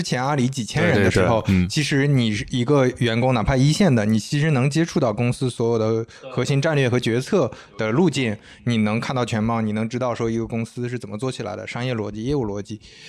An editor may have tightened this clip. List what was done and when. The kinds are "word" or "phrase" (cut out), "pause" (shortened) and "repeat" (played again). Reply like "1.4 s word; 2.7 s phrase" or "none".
none